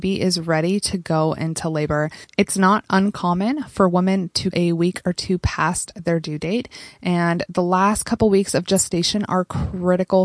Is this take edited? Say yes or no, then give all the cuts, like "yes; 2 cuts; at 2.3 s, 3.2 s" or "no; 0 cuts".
yes; 1 cut; at 4.5 s